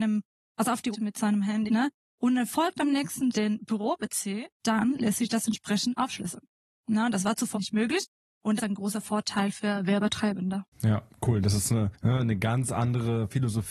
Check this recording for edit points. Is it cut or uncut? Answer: cut